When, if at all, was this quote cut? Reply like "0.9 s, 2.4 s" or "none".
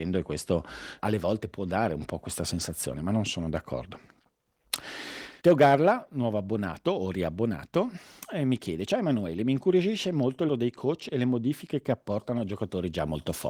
1.0 s, 5.4 s, 10.5 s